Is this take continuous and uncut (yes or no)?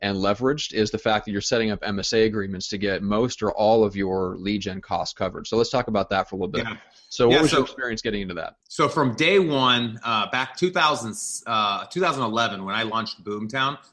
no